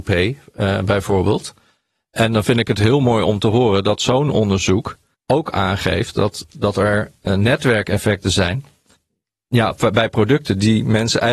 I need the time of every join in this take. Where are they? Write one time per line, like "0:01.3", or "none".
0:05.1